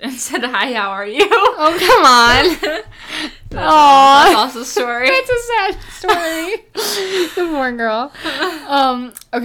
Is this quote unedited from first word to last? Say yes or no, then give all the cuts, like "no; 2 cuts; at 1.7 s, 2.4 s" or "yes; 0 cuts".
yes; 0 cuts